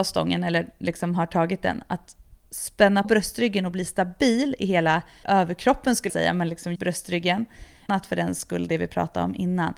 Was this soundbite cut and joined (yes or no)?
yes